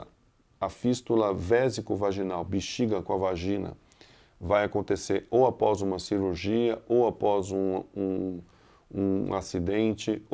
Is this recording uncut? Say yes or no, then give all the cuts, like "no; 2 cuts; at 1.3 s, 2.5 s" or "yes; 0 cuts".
yes; 0 cuts